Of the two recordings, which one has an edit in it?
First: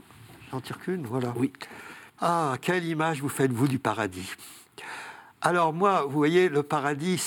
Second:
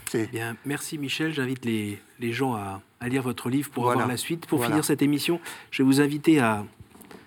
first; 1 cut; at 2.1 s

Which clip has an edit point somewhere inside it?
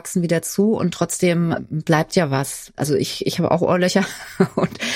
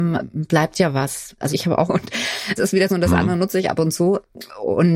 second; 4 cuts; at 1.5 s, 1.9 s, 2.6 s, 2.9 s

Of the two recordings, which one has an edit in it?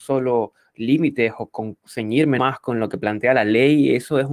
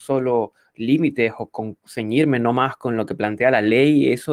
first; 1 cut; at 2.4 s

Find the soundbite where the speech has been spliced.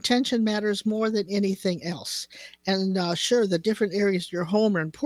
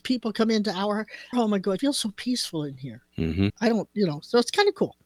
second; 3 cuts; at 1.3 s, 1.8 s, 3.5 s

